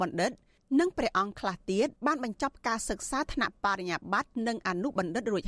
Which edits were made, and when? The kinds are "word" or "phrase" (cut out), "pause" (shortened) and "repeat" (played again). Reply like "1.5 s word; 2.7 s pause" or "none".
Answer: 2.0 s pause